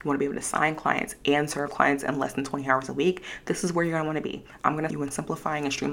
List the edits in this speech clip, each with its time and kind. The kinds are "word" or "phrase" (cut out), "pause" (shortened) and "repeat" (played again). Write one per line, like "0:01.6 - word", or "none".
0:01.7 - word
0:04.9 - word